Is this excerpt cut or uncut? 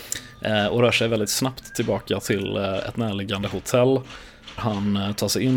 cut